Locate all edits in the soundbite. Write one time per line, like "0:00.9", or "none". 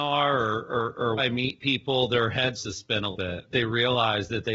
0:01.2
0:02.5
0:03.1
0:03.5